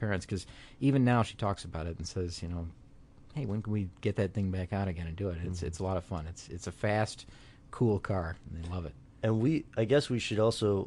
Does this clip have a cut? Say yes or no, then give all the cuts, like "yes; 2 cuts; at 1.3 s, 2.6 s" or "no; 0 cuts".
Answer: no; 0 cuts